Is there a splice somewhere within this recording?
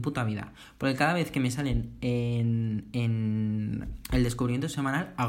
no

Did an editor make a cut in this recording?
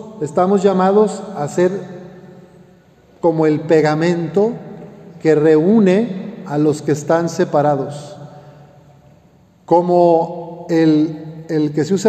no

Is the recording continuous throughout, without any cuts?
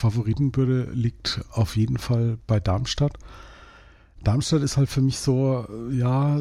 yes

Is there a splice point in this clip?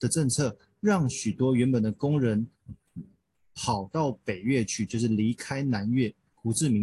no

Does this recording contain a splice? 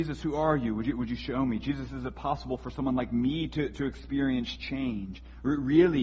no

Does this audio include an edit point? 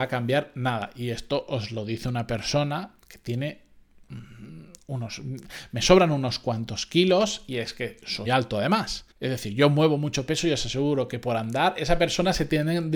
yes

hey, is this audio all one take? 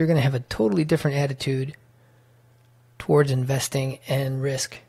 yes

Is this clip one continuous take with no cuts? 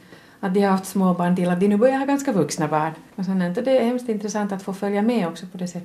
yes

